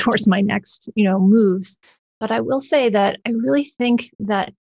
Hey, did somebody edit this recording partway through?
no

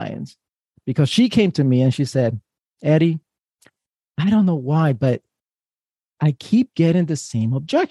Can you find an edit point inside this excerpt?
no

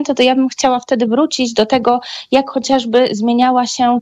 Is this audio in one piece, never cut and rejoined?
yes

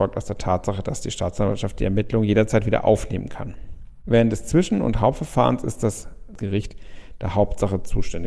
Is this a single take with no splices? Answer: yes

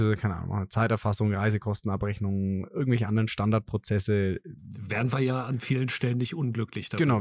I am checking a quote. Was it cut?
no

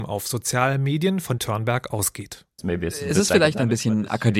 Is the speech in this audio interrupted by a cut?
yes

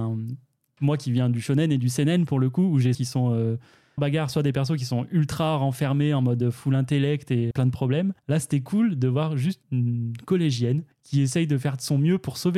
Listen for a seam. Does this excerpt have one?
yes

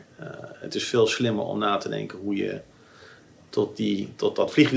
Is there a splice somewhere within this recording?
no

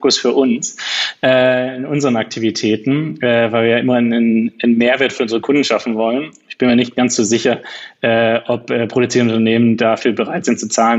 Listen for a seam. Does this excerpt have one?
no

